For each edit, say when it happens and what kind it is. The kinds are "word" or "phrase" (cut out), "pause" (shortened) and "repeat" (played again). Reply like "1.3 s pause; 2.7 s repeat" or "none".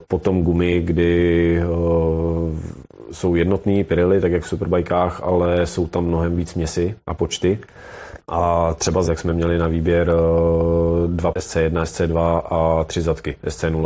6.5 s word; 7.0 s pause; 8.2 s pause; 9.1 s phrase; 11.3 s word